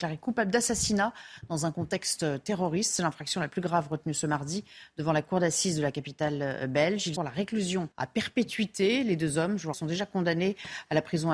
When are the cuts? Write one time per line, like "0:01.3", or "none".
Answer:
0:07.2
0:07.9
0:09.7